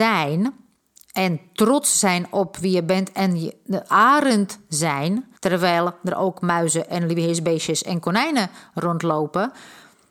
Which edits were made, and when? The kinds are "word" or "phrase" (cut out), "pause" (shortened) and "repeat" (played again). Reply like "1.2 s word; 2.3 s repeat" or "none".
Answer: 5.4 s pause